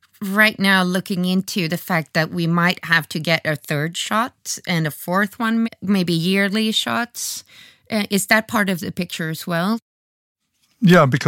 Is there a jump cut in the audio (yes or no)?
yes